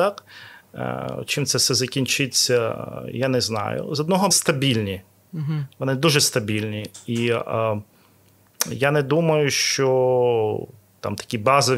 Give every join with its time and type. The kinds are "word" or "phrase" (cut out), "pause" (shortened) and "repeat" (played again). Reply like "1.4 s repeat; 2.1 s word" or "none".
4.3 s phrase

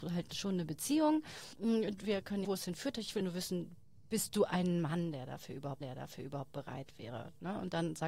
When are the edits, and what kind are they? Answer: 1.5 s pause; 2.4 s phrase; 3.2 s word; 5.8 s repeat

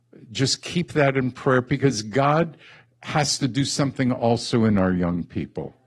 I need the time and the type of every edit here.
none

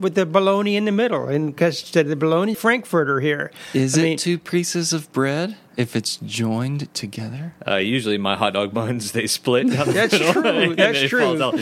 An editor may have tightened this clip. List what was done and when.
2.5 s phrase

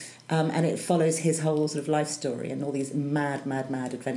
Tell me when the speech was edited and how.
none

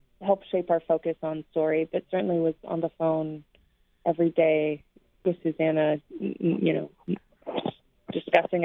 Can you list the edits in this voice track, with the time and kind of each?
none

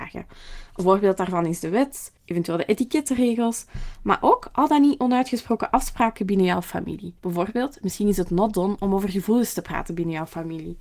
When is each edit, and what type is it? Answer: 2.2 s pause; 7.2 s pause

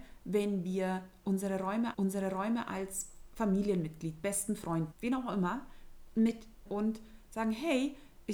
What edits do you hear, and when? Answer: 1.9 s repeat; 4.9 s word; 6.7 s phrase

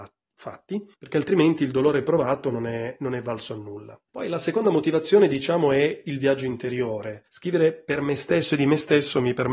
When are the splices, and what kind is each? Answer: 0.9 s pause; 4.1 s pause; 7.3 s pause

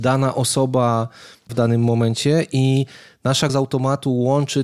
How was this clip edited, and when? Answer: 1.5 s word; 3.5 s word

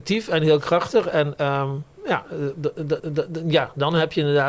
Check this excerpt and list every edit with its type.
3.0 s repeat

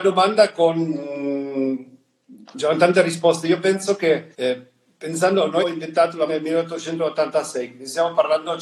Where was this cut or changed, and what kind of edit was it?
2.5 s word; 4.3 s pause; 5.6 s word; 6.3 s word

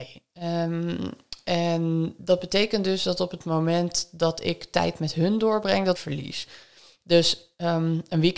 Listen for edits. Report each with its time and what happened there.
5.9 s phrase

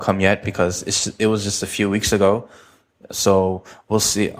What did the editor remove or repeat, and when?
none

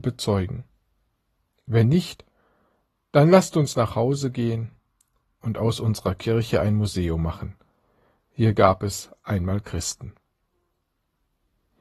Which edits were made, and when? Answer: none

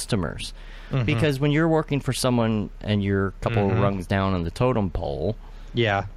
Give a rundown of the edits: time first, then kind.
none

